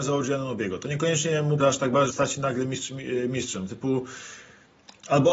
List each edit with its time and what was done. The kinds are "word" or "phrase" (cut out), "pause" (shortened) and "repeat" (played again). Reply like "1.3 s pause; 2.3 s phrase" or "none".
1.6 s word; 2.1 s word